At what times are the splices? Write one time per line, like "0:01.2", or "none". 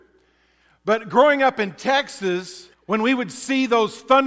0:02.7